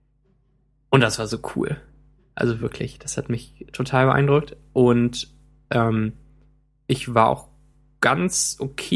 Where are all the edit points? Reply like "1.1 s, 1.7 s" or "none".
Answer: none